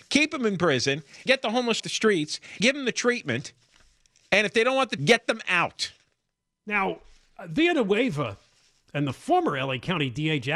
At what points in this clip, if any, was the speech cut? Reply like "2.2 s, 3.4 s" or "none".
1.3 s, 1.8 s, 2.6 s, 5.0 s